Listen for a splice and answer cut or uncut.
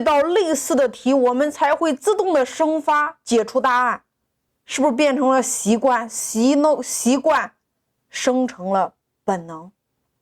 uncut